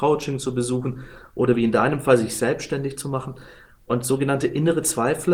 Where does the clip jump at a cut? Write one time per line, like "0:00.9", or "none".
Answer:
none